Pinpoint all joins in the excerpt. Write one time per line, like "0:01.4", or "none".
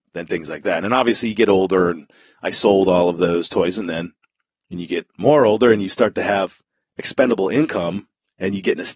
none

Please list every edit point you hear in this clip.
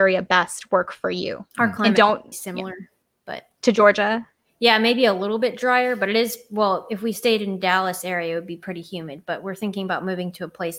0:01.5
0:02.3
0:03.0

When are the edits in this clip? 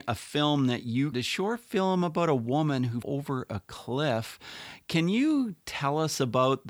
0:01.1
0:03.0

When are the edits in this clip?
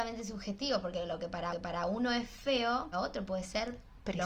0:01.5
0:02.9

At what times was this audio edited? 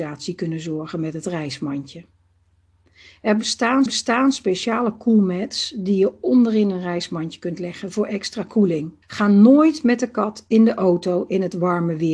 0:03.9
0:09.0

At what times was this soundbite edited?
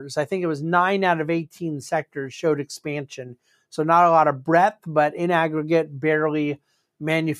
none

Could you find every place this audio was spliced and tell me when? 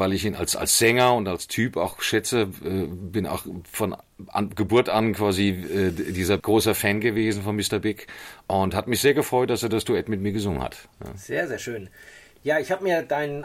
0:06.4

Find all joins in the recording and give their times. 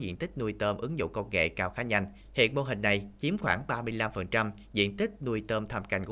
0:02.2

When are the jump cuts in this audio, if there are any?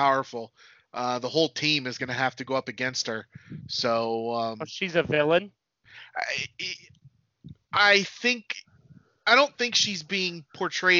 none

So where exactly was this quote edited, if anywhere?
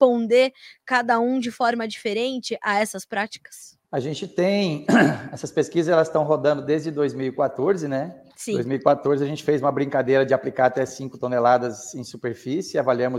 0:03.8
0:08.3

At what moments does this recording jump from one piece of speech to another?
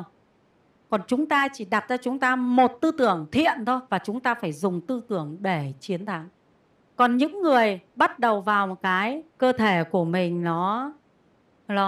0:03.9
0:06.6
0:07.9
0:09.3

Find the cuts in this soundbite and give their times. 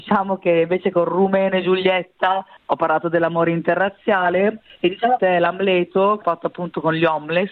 0:05.2
0:06.2

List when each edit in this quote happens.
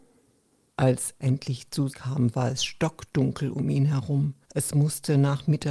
0:01.2
0:01.9
0:04.4

